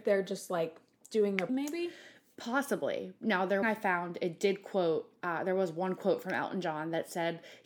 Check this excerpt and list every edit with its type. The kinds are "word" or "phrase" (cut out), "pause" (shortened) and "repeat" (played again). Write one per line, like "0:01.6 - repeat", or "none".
0:01.5 - phrase
0:03.6 - phrase